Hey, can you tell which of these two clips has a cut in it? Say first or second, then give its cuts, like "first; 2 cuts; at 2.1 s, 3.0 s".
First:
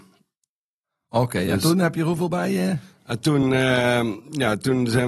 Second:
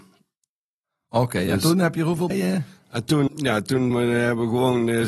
second; 3 cuts; at 2.3 s, 3.3 s, 3.9 s